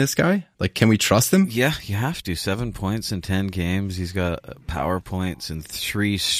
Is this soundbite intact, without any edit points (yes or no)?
no